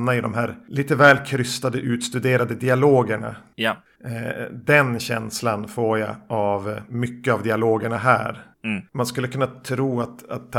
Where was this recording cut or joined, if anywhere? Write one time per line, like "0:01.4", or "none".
0:08.5